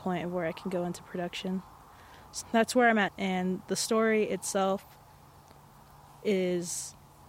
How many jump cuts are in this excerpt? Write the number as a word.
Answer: two